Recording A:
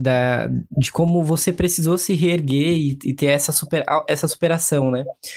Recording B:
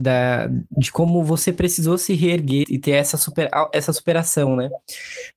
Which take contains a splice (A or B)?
B